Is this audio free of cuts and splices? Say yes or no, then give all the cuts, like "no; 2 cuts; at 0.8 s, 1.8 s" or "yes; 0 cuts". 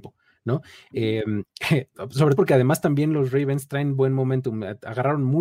no; 1 cut; at 2.4 s